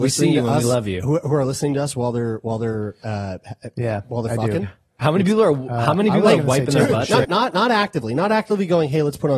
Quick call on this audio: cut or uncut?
cut